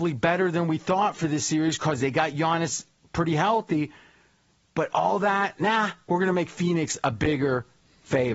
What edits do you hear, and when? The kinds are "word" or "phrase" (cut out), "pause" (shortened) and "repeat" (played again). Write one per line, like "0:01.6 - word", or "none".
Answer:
none